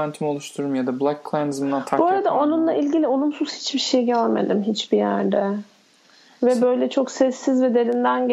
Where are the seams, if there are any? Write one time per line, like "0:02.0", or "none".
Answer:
none